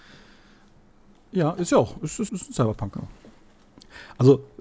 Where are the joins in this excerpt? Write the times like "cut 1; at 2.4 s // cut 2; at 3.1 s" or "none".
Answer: cut 1; at 2.3 s